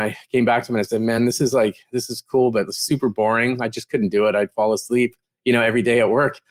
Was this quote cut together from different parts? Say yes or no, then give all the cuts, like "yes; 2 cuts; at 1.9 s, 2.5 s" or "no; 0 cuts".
no; 0 cuts